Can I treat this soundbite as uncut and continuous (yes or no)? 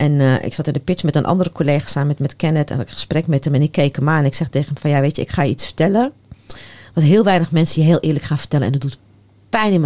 yes